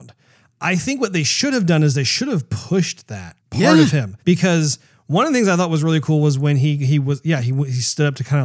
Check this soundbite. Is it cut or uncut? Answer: cut